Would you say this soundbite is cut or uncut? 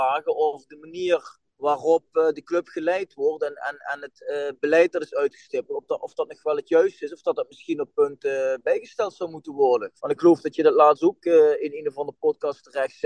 cut